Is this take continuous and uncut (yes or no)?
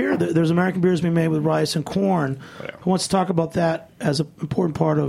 yes